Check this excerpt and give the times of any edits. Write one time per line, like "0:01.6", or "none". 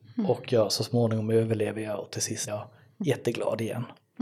0:02.5